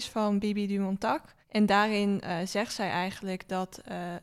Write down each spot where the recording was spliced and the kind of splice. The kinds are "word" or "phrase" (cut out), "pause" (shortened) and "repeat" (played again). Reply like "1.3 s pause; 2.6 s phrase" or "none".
1.4 s pause